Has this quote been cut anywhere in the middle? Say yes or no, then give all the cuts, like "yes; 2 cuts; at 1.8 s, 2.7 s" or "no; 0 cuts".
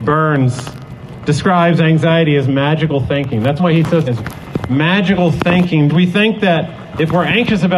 yes; 3 cuts; at 3.6 s, 4.1 s, 5.9 s